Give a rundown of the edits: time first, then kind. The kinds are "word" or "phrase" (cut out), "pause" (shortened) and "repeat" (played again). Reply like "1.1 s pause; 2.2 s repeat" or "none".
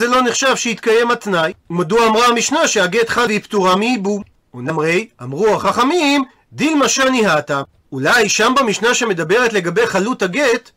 3.3 s word; 4.7 s word